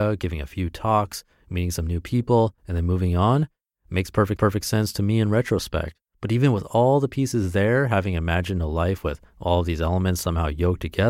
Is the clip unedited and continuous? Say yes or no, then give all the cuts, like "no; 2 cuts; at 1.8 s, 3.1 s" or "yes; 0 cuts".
no; 3 cuts; at 2.6 s, 4.4 s, 6.0 s